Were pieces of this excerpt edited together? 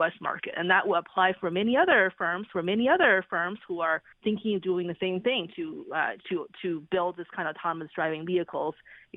yes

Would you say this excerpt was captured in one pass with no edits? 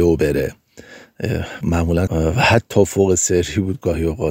no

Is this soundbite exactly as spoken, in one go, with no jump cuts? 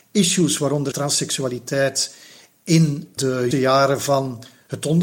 no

